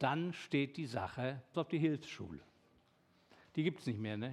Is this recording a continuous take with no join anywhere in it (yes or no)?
no